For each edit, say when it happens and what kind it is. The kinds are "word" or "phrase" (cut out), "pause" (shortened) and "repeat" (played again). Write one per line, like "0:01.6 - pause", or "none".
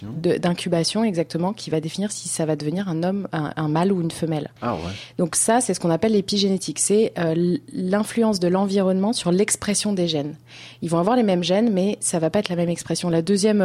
0:04.6 - pause